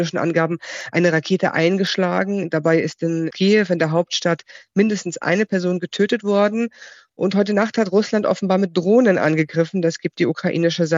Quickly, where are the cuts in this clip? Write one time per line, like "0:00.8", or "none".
none

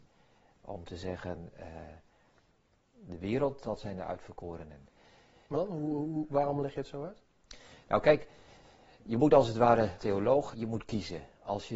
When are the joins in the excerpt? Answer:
0:05.5
0:10.0
0:10.5

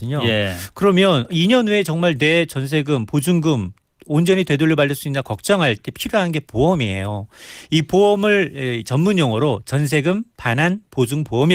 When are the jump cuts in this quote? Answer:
none

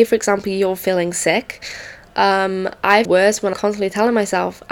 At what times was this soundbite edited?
0:03.0
0:03.5

